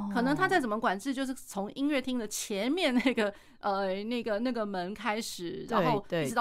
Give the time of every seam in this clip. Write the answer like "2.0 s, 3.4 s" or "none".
none